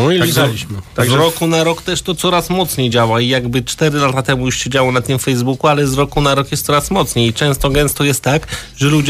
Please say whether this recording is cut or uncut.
uncut